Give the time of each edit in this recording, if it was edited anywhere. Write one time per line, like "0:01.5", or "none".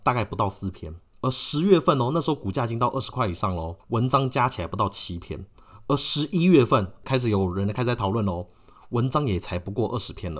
0:03.8